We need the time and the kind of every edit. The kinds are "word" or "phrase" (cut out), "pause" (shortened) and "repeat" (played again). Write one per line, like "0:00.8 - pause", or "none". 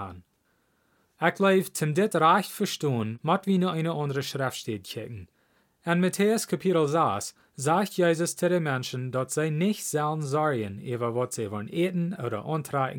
none